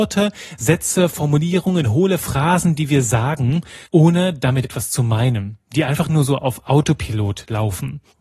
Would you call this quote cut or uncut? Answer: cut